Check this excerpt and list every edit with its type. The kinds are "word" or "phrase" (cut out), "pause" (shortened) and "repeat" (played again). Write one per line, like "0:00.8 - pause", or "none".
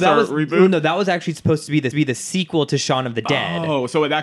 0:01.9 - repeat